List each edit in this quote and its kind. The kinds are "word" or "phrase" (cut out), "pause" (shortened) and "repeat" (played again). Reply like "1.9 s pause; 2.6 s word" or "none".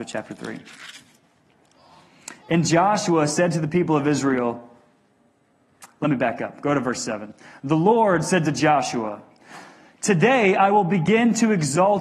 none